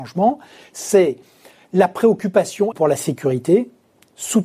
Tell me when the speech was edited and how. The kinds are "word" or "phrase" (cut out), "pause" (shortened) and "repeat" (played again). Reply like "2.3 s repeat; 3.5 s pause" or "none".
2.7 s word